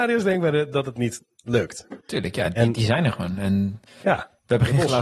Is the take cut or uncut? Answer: cut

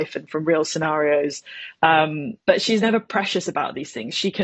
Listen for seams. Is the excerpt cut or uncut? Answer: cut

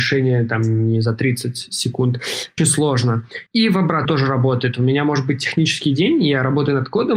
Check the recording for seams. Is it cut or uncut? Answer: cut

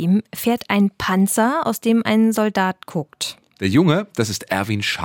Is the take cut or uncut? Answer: uncut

